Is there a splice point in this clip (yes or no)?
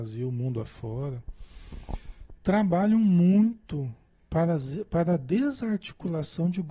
yes